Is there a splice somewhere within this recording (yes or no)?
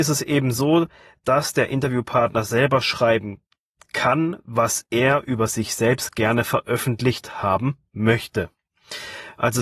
no